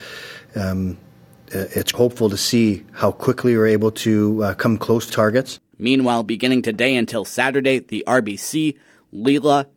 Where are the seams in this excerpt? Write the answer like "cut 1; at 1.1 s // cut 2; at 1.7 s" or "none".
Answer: cut 1; at 1.9 s // cut 2; at 5.1 s